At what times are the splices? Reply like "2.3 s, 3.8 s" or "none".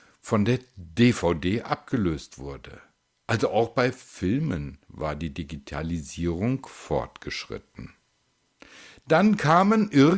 none